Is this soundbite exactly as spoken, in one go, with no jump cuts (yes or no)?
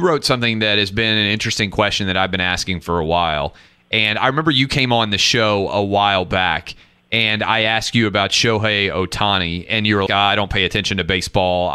no